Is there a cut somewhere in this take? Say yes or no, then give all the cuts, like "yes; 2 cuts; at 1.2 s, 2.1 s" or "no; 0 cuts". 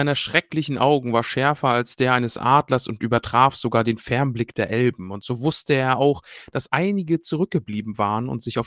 no; 0 cuts